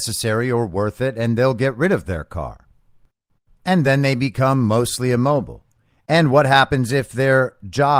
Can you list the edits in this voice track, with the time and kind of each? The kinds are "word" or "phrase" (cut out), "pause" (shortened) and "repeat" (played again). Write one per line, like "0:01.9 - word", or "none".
none